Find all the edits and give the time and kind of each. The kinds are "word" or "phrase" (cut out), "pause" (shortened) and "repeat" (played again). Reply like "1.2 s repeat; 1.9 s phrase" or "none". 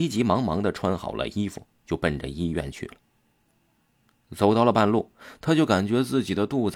none

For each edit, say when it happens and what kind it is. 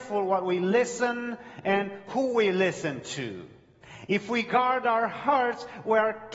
none

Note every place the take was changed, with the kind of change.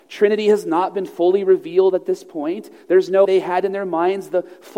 3.2 s word

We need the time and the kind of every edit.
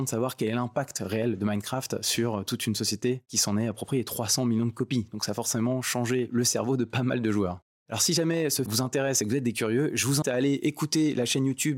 8.7 s word; 10.2 s word

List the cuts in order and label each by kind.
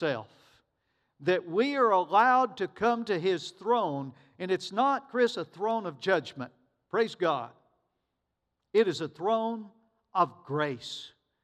none

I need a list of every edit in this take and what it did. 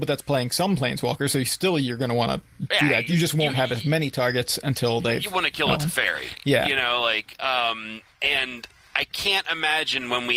none

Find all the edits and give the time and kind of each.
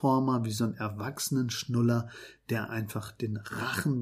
none

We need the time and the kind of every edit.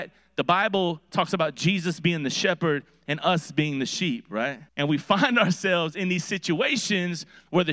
4.7 s pause

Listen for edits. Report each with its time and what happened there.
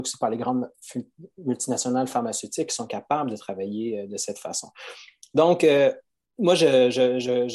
none

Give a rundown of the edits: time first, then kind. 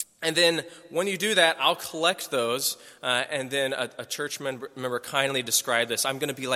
none

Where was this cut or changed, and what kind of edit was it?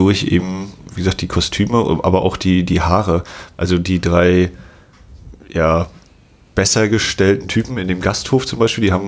none

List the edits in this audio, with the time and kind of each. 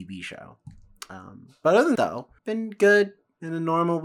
1.9 s word; 2.4 s pause

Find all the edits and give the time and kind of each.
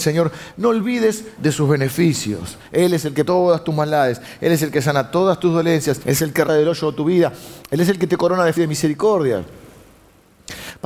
1.4 s word; 3.2 s word; 6.0 s word; 6.5 s word; 8.5 s word

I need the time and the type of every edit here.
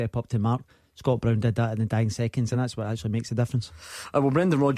none

